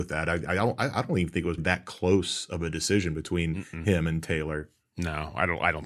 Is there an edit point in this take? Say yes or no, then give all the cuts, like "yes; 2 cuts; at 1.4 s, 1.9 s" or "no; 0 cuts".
yes; 1 cut; at 1.6 s